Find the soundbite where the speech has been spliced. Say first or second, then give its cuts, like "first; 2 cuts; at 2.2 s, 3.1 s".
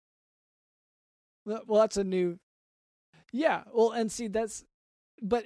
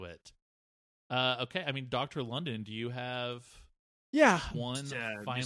second; 1 cut; at 4.5 s